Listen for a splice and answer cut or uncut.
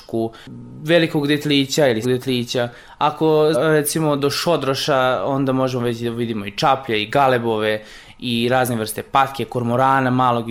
cut